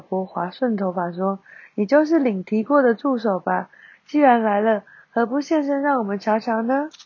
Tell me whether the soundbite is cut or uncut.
uncut